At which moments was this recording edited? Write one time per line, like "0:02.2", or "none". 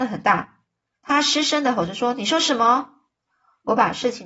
none